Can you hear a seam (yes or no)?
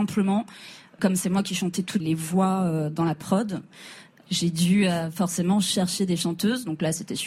yes